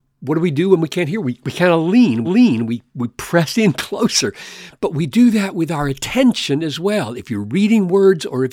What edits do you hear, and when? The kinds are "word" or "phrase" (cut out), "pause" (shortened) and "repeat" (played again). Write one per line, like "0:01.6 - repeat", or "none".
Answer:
0:02.2 - repeat